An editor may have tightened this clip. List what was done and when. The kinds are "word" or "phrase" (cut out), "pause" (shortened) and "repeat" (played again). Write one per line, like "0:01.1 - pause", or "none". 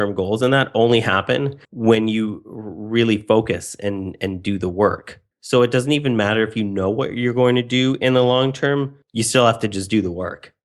0:01.6 - pause
0:05.3 - pause
0:09.0 - pause